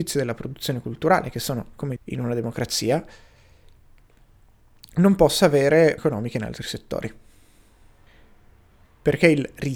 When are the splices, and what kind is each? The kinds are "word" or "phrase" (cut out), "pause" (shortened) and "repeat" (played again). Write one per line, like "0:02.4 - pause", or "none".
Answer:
0:02.0 - phrase
0:06.0 - word